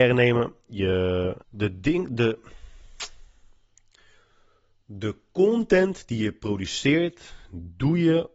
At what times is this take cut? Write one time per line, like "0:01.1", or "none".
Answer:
0:01.4

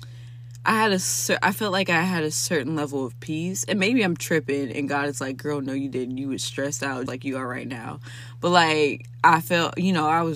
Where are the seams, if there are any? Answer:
0:07.1

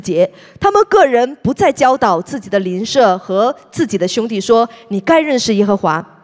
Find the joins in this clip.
none

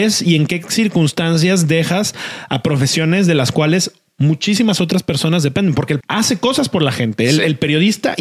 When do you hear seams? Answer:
0:06.0

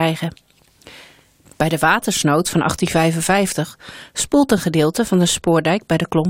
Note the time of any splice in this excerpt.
none

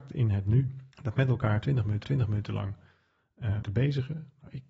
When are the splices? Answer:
0:00.9
0:02.0
0:03.6

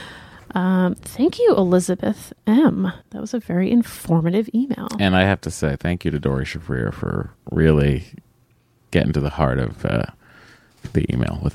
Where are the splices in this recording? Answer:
0:03.0
0:07.4

